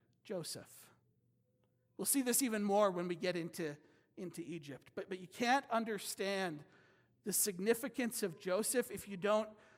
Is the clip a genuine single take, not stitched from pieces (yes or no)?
yes